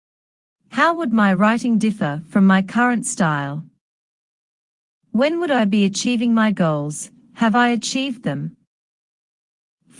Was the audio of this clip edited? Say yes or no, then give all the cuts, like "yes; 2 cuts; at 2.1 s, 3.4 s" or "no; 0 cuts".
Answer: no; 0 cuts